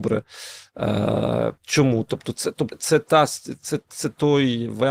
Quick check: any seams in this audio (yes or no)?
yes